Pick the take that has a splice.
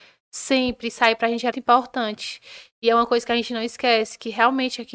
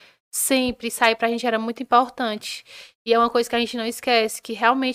first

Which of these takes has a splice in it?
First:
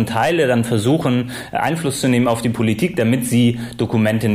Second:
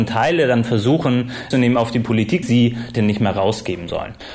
second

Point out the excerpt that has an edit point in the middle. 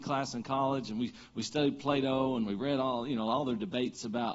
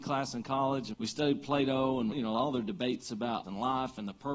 second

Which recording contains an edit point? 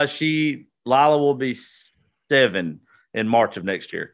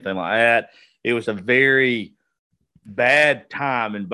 second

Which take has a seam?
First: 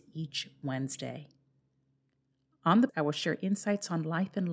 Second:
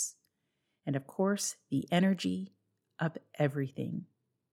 first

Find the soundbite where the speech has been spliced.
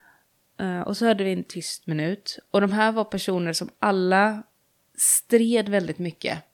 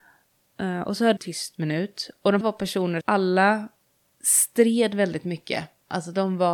second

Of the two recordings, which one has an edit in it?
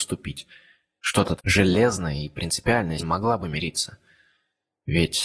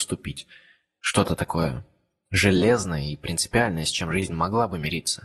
first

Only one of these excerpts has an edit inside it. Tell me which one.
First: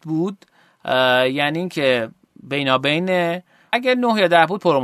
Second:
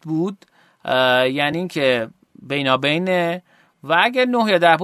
first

